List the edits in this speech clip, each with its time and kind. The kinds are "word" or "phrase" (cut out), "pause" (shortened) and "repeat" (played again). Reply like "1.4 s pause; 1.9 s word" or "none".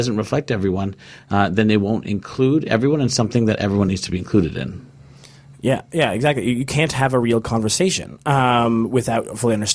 none